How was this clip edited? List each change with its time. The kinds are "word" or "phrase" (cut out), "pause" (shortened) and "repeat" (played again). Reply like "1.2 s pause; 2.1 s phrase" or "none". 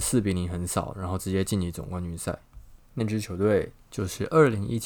2.8 s pause